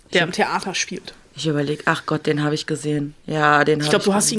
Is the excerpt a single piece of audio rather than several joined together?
yes; 0 cuts

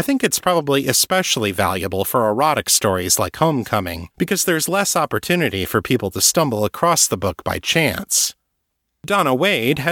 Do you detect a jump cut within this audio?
yes; 1 cut; at 4.1 s

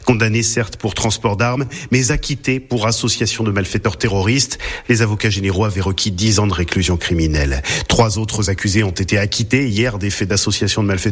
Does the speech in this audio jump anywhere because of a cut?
no; 0 cuts

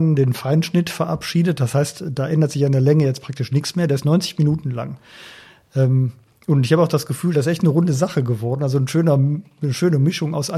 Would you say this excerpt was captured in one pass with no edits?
yes; 0 cuts

